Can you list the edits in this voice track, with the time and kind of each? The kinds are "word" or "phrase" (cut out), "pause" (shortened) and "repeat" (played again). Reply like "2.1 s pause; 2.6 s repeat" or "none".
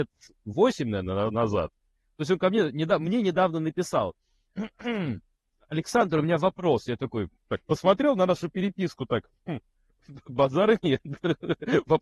7.4 s pause